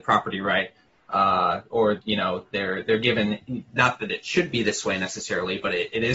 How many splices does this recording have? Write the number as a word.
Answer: zero